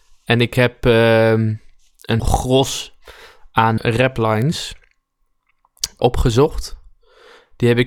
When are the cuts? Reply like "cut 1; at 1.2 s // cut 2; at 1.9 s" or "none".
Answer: cut 1; at 2.2 s // cut 2; at 3.8 s // cut 3; at 6.0 s